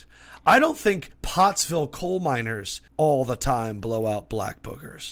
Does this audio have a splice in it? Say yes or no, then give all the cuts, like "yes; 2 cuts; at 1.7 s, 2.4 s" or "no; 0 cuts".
yes; 2 cuts; at 1.1 s, 2.9 s